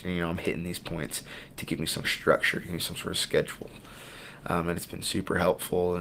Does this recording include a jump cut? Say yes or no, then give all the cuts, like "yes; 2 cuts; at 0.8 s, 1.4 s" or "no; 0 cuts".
yes; 1 cut; at 2.0 s